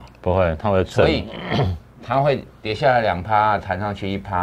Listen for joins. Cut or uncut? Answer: uncut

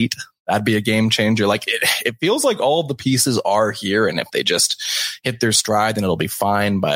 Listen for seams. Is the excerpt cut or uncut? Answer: uncut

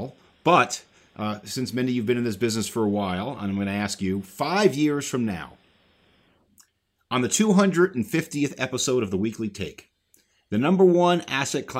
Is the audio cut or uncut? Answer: uncut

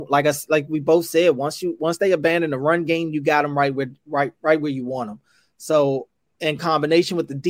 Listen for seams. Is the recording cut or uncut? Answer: uncut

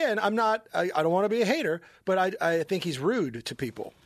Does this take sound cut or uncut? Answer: uncut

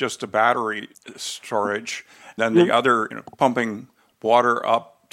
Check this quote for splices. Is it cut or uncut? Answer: cut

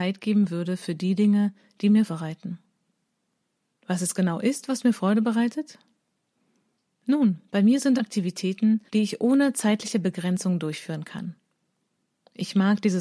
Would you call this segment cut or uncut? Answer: cut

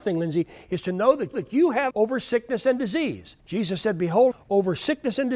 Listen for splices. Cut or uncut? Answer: cut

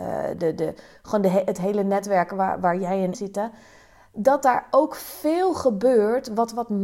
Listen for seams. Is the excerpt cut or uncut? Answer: cut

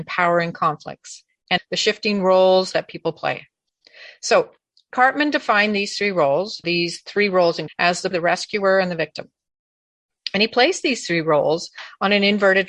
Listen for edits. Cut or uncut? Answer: cut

